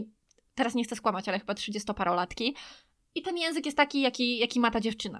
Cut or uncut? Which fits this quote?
uncut